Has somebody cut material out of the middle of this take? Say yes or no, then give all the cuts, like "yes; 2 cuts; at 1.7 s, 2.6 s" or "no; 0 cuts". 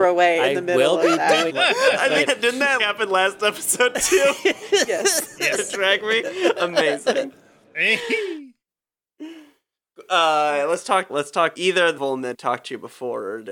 yes; 8 cuts; at 1.5 s, 2.3 s, 2.8 s, 5.6 s, 11.1 s, 11.6 s, 12.0 s, 12.3 s